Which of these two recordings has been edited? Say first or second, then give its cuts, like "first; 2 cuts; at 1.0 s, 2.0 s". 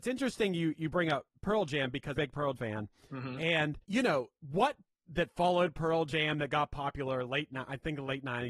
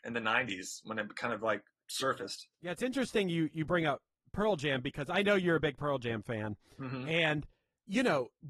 first; 5 cuts; at 1.3 s, 2.2 s, 2.6 s, 3.8 s, 4.9 s